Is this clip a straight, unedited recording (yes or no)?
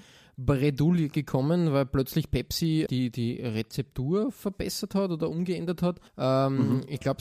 no